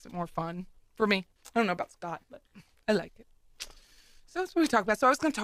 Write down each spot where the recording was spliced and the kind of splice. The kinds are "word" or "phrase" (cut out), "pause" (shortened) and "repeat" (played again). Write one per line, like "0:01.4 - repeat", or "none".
0:01.4 - pause

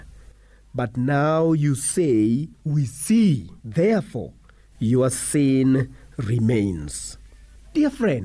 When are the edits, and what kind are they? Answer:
0:02.5 - pause
0:03.6 - pause

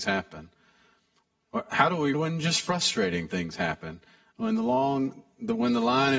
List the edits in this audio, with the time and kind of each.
0:02.1 - word

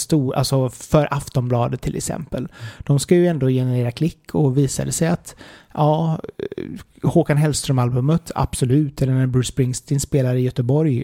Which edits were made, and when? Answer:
none

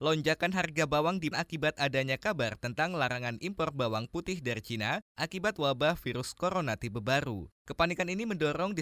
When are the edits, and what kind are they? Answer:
0:01.3 - word

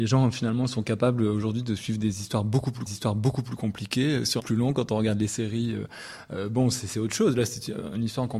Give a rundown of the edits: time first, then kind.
0:02.9 - repeat
0:04.4 - phrase

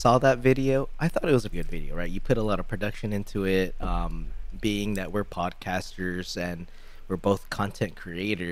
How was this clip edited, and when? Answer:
0:01.5 - word

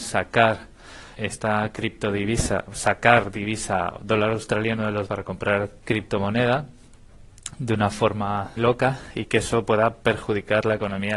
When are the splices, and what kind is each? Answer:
0:01.1 - word
0:02.7 - word
0:05.1 - word
0:05.8 - pause
0:08.6 - word

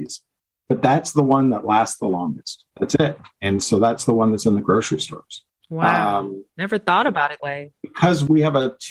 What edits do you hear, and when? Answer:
0:02.7 - pause
0:05.5 - pause
0:06.5 - pause
0:07.4 - word

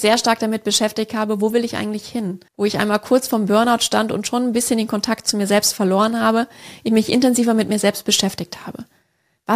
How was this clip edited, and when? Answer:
0:02.5 - pause

